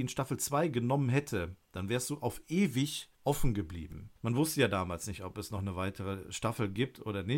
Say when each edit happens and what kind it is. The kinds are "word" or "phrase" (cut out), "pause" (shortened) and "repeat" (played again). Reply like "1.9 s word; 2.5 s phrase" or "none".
3.1 s pause; 4.2 s pause